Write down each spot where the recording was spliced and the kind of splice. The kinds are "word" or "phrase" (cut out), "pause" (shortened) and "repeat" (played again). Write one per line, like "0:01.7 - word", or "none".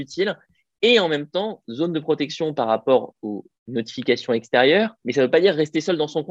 0:03.6 - pause
0:05.0 - pause